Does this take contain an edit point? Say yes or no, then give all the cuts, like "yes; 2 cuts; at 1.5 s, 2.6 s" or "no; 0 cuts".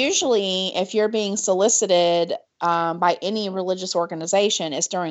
no; 0 cuts